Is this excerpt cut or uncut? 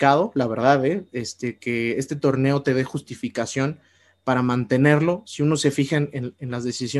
uncut